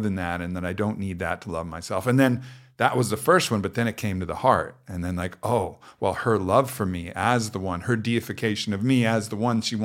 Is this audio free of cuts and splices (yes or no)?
yes